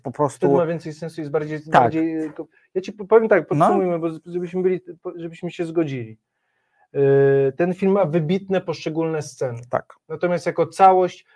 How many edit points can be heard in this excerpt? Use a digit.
0